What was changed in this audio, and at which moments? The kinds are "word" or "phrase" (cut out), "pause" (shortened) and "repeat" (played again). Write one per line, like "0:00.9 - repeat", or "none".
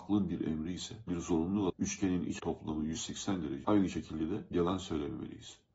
0:01.1 - word
0:01.7 - word
0:02.4 - word
0:03.6 - word